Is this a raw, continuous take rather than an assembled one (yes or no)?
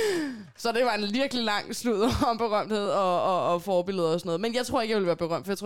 yes